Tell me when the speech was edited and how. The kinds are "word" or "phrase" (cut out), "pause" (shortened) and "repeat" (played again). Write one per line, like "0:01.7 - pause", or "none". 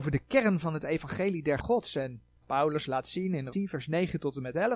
0:01.6 - word
0:02.4 - word
0:03.5 - word